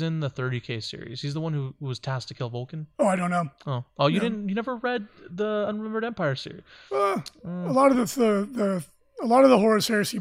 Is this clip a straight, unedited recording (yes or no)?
yes